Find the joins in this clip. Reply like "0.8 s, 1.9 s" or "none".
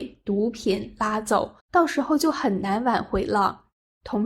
1.6 s